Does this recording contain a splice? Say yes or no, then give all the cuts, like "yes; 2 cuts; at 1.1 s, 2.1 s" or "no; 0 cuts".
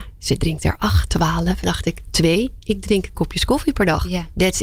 yes; 3 cuts; at 1.1 s, 1.6 s, 3.1 s